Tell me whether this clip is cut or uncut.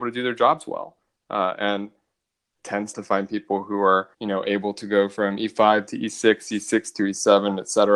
cut